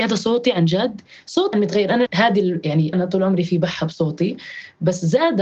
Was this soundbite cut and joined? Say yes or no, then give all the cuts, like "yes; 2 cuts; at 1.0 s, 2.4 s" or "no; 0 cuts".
yes; 3 cuts; at 1.5 s, 2.1 s, 2.9 s